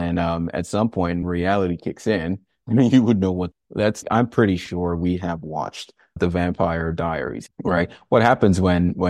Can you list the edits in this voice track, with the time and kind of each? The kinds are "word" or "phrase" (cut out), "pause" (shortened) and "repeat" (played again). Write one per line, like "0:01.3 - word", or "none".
0:01.2 - word
0:03.5 - word
0:04.0 - word
0:06.2 - word
0:07.5 - word